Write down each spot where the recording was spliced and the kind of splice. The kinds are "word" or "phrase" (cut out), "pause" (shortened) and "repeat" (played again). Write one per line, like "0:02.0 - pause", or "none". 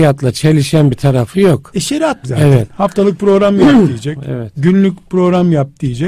0:02.2 - phrase